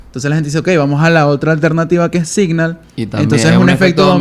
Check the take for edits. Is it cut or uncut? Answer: uncut